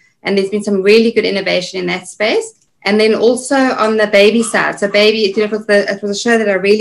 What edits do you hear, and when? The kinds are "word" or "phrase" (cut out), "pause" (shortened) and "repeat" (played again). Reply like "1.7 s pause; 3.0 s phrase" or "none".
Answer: 2.7 s pause